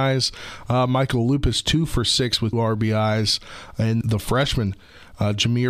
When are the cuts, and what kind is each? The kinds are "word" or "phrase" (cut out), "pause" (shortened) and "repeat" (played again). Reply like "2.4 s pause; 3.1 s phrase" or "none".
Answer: 2.5 s word; 4.0 s word